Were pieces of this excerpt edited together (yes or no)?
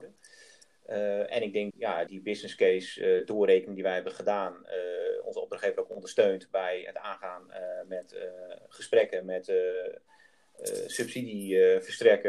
yes